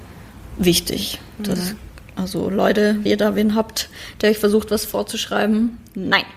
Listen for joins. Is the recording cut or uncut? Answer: cut